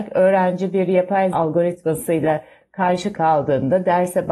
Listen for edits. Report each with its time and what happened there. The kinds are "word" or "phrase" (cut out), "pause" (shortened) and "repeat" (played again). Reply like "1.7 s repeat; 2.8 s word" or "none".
1.3 s word; 3.1 s word